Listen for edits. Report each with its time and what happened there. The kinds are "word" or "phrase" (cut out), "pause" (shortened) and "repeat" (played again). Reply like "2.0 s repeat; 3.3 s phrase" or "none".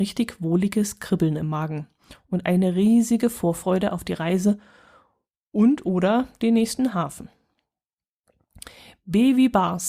none

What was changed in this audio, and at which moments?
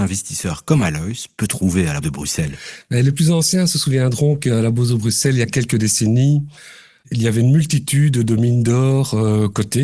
2.0 s word

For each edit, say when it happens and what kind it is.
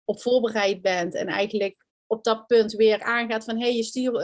1.9 s pause; 3.0 s phrase

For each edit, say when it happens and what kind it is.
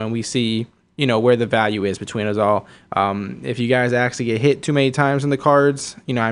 none

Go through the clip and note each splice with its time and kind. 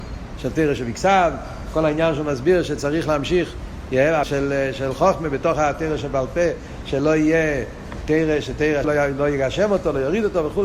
4.2 s phrase; 8.8 s phrase

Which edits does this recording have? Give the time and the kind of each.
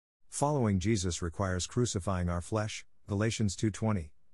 none

